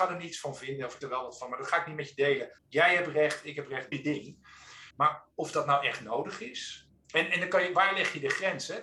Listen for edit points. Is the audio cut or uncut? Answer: cut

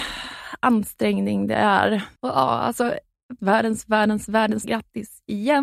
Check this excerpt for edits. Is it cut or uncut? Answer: cut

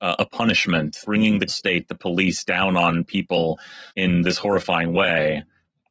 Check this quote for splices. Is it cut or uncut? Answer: cut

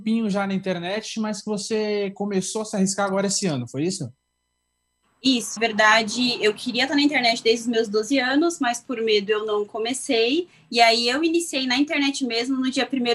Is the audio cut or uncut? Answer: cut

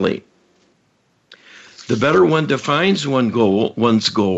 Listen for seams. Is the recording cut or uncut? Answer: uncut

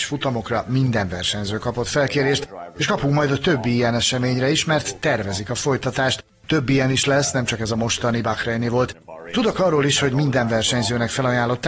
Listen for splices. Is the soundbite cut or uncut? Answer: uncut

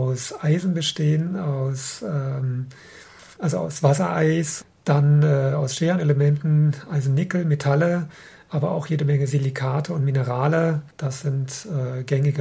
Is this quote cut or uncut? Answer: uncut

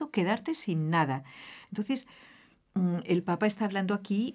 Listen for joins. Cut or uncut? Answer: uncut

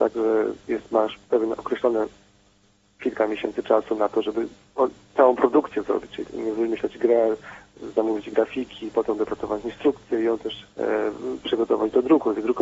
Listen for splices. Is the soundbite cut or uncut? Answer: cut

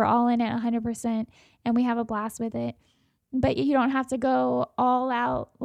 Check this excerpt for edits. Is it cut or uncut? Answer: uncut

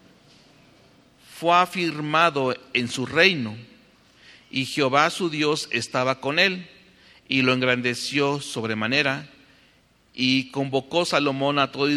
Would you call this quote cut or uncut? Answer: uncut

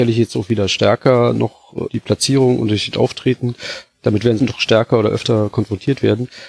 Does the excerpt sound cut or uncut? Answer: cut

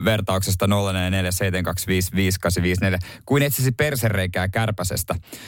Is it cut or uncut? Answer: uncut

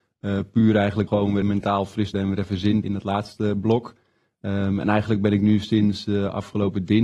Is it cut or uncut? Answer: cut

